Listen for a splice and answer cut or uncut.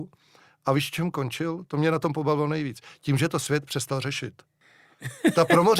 uncut